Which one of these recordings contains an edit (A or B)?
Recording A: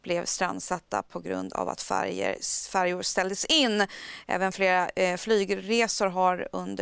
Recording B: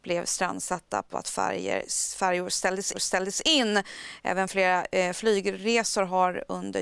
B